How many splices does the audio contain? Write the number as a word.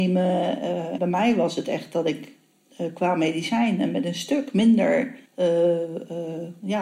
two